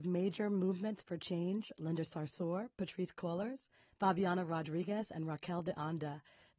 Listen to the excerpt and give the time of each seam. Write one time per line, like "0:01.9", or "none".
none